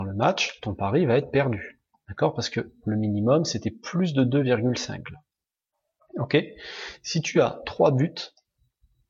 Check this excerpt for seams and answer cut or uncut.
uncut